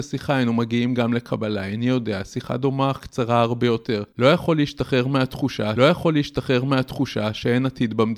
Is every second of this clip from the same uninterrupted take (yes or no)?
no